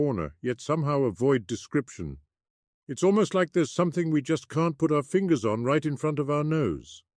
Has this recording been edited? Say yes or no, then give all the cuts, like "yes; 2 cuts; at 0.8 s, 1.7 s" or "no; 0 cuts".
no; 0 cuts